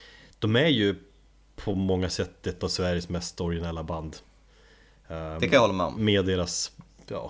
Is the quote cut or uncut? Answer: uncut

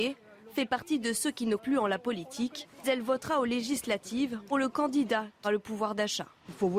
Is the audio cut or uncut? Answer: cut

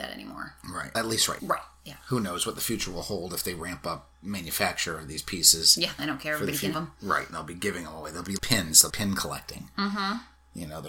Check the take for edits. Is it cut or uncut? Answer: cut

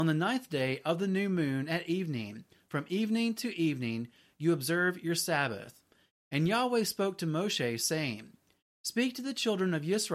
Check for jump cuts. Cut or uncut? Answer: uncut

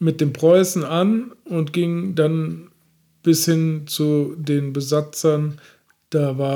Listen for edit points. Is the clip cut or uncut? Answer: uncut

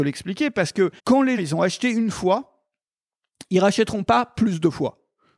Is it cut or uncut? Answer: cut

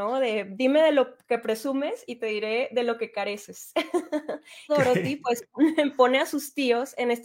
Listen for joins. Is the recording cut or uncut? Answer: cut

